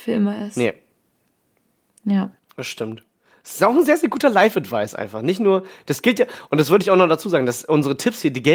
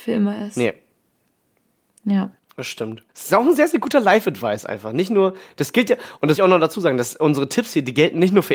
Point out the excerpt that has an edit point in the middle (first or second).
second